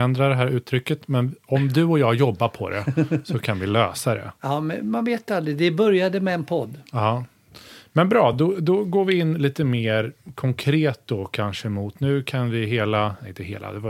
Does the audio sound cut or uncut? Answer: uncut